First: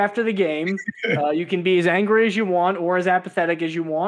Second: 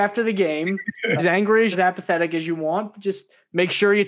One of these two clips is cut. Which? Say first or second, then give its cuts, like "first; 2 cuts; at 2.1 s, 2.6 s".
second; 2 cuts; at 1.2 s, 1.7 s